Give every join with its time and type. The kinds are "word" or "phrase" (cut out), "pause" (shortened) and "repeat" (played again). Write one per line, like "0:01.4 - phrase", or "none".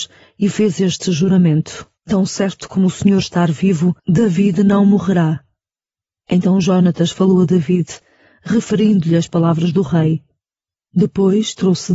0:02.0 - pause
0:04.0 - pause